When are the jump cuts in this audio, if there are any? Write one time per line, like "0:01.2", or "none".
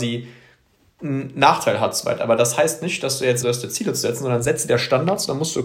0:03.4